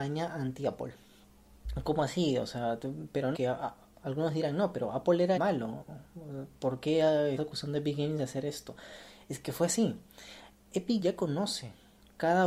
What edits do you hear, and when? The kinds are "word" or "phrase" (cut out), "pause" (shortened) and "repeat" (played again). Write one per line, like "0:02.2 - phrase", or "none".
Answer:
0:03.3 - word
0:03.9 - pause
0:05.3 - word
0:07.4 - word
0:11.0 - word